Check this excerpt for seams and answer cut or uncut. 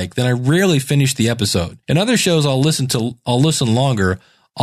cut